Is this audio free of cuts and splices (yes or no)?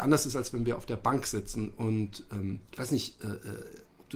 no